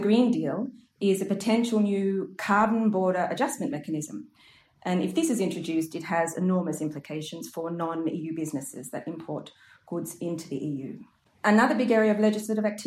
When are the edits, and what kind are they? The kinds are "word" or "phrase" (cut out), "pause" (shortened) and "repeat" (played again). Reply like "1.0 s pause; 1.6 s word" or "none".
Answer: none